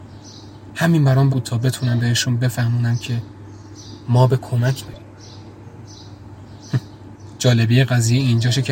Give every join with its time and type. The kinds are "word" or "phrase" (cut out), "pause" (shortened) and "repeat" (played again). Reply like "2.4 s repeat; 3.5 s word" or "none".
1.3 s word; 4.8 s word